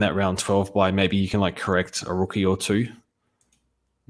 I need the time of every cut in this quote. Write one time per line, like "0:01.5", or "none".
none